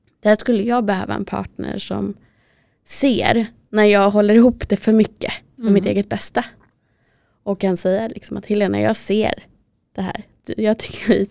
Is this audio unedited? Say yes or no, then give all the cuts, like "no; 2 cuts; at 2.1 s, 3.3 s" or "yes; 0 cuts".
yes; 0 cuts